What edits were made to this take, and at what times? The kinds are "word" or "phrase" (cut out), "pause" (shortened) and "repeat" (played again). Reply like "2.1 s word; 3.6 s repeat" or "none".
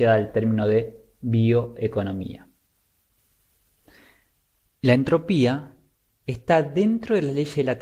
none